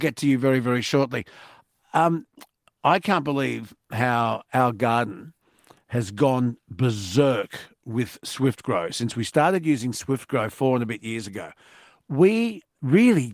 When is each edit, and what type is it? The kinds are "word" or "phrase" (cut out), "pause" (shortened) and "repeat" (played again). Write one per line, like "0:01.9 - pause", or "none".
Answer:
none